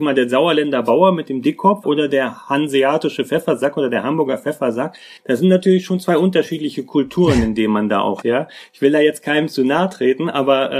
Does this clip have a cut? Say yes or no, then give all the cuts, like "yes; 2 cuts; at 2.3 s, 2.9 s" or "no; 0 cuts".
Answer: yes; 3 cuts; at 1.8 s, 5.2 s, 8.2 s